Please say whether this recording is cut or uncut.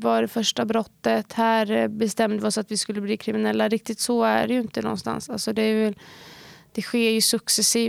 uncut